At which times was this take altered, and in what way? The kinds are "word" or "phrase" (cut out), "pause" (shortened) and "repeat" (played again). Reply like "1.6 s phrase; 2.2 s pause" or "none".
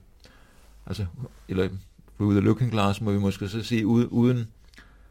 none